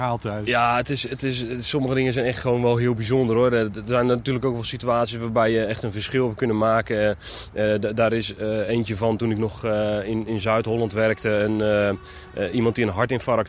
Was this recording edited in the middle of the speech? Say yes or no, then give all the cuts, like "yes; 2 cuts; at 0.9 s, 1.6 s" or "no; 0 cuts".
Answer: no; 0 cuts